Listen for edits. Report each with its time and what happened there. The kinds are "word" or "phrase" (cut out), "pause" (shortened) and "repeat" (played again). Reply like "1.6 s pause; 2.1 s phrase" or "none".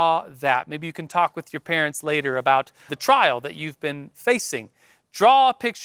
2.9 s word

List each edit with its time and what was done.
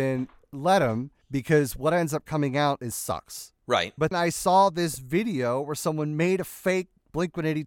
1.2 s pause; 2.9 s word; 4.1 s word

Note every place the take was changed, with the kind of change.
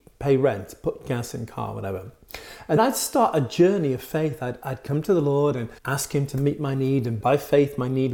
2.8 s word; 5.8 s pause; 7.2 s phrase

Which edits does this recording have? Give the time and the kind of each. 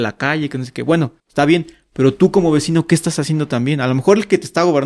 1.2 s pause

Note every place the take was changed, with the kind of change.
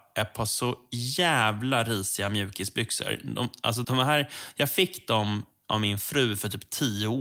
3.8 s word

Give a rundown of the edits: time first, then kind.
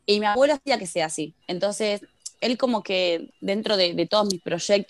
1.4 s pause

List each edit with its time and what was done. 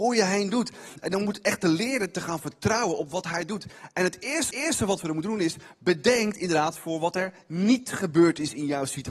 4.5 s repeat

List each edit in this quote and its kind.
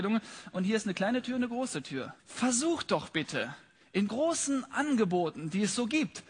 2.2 s pause; 4.1 s word

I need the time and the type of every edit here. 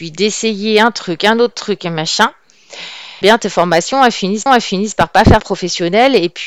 3.2 s word; 4.5 s repeat; 5.4 s word

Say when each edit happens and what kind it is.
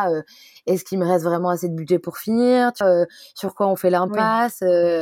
2.8 s word

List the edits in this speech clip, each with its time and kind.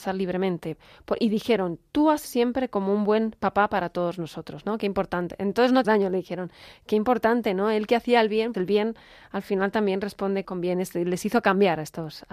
2.2 s word; 5.8 s word; 8.5 s word; 10.4 s word

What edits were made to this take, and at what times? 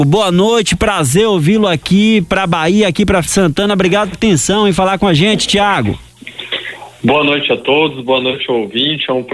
3.2 s word; 4.1 s word

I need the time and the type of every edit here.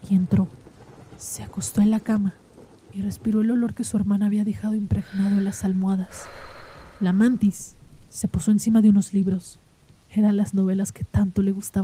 none

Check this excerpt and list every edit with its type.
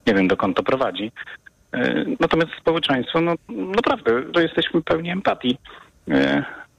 2.6 s word; 3.5 s word; 4.3 s word

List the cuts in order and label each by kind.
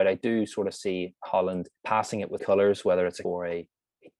1.8 s pause; 2.4 s word; 3.2 s word

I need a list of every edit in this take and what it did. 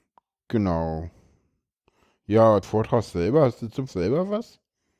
2.6 s word; 3.9 s word

